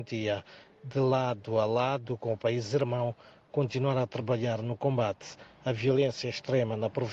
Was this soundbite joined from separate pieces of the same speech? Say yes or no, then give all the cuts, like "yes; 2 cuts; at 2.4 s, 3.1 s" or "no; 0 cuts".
no; 0 cuts